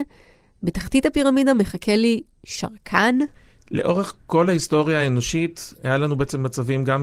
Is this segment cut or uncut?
uncut